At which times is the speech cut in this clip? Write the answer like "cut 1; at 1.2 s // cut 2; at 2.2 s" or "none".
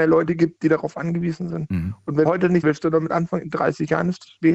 cut 1; at 2.3 s // cut 2; at 2.6 s